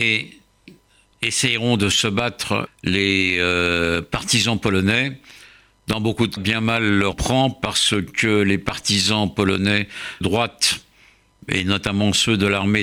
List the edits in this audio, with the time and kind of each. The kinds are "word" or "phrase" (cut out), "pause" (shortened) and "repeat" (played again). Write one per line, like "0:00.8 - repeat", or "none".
0:02.7 - word
0:06.4 - word
0:07.1 - word
0:10.2 - word